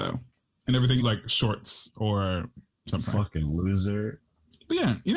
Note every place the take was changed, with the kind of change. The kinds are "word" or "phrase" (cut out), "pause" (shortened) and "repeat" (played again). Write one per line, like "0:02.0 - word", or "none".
0:01.0 - word